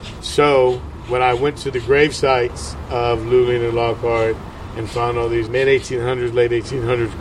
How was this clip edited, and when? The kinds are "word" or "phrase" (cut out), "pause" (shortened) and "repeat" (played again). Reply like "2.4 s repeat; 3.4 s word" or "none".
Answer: 5.5 s word